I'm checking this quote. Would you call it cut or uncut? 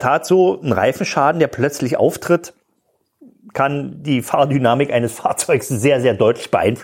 uncut